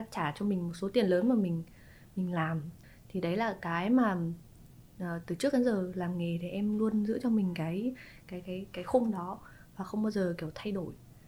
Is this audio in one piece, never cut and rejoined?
yes; 0 cuts

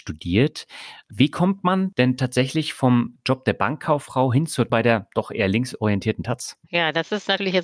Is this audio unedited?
no; 2 cuts; at 4.7 s, 6.6 s

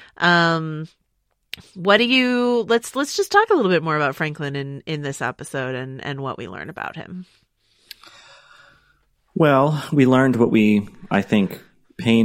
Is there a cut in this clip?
no; 0 cuts

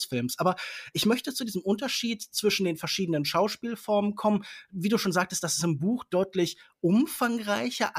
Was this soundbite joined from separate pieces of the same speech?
no; 0 cuts

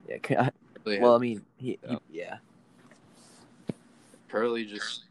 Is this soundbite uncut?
no; 1 cut; at 2.0 s

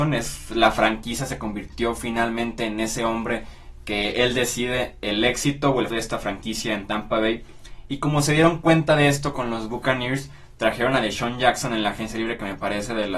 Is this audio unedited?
no; 1 cut; at 5.9 s

